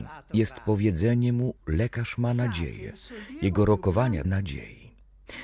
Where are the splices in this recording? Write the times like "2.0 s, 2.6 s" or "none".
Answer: 4.2 s